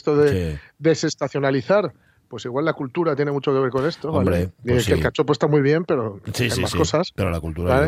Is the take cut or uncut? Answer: uncut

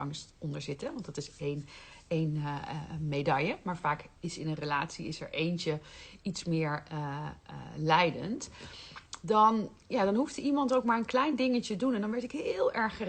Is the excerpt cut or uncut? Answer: cut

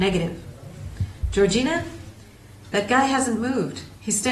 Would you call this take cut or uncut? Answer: uncut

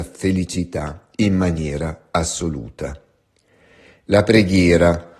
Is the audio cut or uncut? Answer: uncut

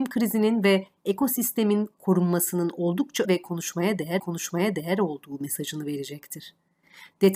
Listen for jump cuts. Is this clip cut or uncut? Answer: cut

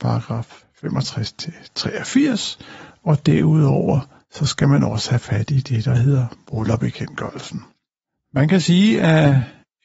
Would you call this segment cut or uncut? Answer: uncut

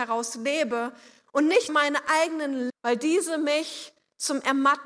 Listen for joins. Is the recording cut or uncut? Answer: cut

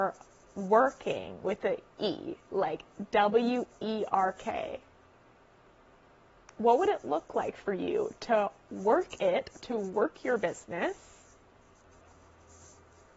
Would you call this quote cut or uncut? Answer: uncut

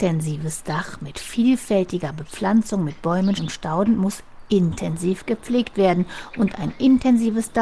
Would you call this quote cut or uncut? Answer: cut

